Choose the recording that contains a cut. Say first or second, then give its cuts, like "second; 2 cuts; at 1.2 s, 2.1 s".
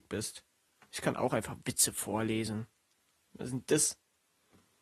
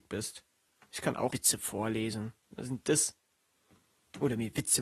second; 2 cuts; at 1.3 s, 2.4 s